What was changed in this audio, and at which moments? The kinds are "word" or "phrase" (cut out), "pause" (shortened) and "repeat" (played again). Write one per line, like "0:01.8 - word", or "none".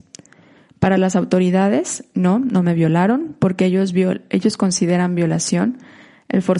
none